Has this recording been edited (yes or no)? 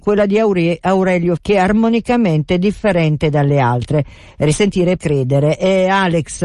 yes